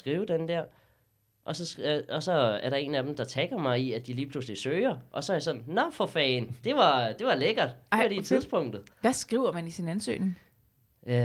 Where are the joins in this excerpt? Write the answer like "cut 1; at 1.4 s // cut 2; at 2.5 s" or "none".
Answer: cut 1; at 8.9 s

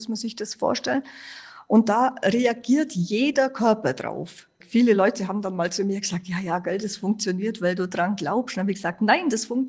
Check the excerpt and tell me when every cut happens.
none

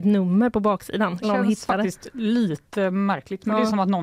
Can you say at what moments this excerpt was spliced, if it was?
cut 1; at 1.2 s

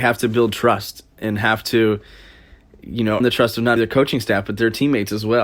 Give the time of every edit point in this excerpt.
cut 1; at 3.2 s // cut 2; at 3.8 s

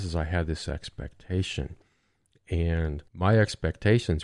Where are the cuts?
cut 1; at 3.1 s

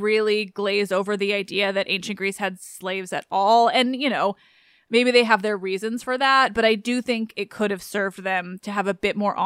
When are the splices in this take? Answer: none

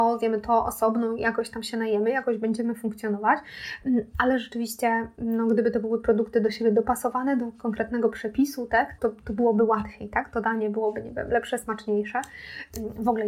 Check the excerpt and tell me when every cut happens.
cut 1; at 9.0 s

